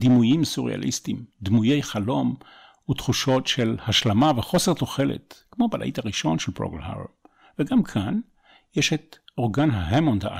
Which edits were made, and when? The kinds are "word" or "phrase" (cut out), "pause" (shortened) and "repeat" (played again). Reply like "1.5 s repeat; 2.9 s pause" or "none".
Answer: 1.3 s pause